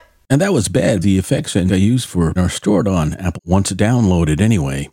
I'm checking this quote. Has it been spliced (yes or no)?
yes